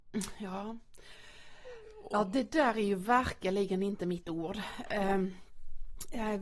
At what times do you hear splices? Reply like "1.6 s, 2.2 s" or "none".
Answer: none